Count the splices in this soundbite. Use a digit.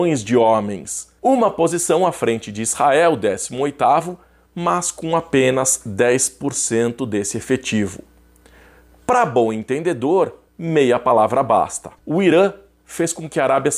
3